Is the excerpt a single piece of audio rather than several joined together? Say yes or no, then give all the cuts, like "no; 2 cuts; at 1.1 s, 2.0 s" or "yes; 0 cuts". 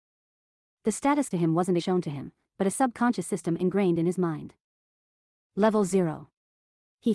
no; 2 cuts; at 1.3 s, 1.8 s